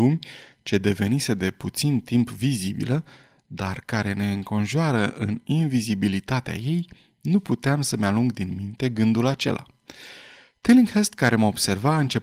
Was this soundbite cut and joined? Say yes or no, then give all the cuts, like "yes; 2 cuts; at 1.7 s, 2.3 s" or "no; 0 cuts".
no; 0 cuts